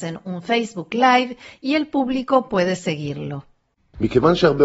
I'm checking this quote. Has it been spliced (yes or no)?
no